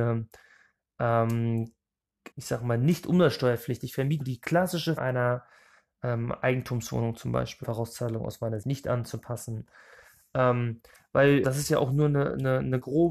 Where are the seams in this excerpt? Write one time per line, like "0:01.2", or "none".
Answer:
0:02.3
0:04.2
0:05.0
0:07.6
0:08.6
0:11.4